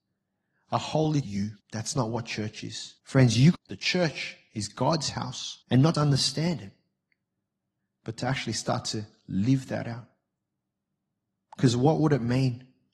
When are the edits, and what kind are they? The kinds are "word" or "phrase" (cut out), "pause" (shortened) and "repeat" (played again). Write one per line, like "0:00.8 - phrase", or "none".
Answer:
0:01.2 - phrase
0:01.6 - pause
0:03.0 - pause
0:03.5 - phrase
0:05.6 - pause
0:05.9 - word